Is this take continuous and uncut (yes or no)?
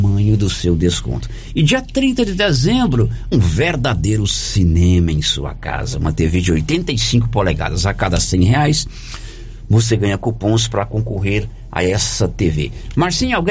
no